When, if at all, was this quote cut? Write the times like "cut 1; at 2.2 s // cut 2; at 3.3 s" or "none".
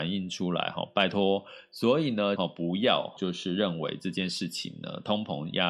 cut 1; at 2.4 s // cut 2; at 3.2 s